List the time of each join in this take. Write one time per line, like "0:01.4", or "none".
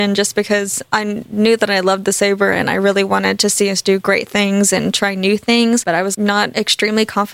0:06.1